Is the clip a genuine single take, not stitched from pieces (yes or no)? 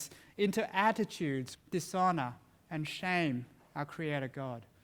no